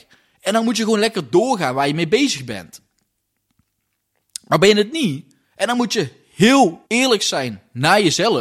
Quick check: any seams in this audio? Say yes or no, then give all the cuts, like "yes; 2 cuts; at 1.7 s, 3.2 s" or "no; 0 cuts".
yes; 2 cuts; at 5.4 s, 6.9 s